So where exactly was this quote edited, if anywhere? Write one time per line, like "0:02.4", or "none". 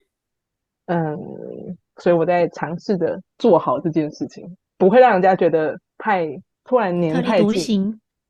0:01.9
0:03.3
0:06.5